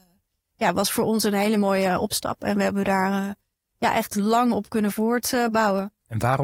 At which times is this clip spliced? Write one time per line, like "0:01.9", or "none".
none